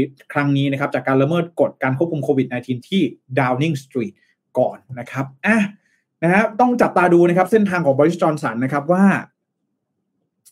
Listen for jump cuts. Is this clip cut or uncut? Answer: uncut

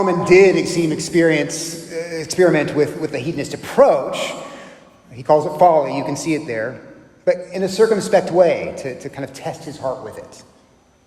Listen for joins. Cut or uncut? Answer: uncut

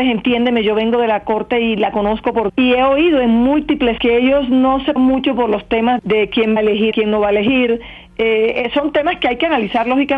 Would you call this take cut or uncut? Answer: cut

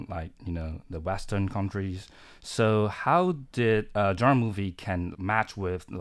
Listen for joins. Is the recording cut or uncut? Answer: cut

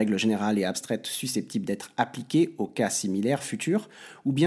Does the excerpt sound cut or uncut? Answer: uncut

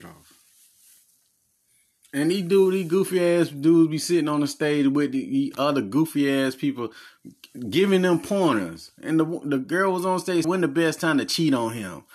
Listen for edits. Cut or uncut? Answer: cut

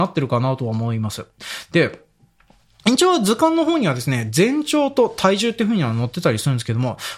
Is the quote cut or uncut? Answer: uncut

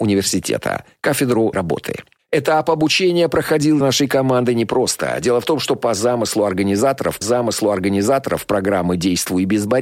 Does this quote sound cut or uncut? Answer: cut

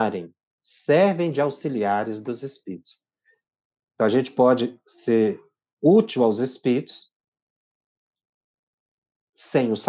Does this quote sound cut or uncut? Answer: uncut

